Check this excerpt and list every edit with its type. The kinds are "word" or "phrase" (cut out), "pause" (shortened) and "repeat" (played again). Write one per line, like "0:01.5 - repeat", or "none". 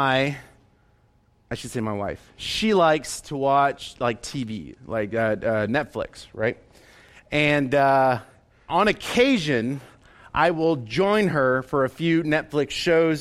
0:08.7 - word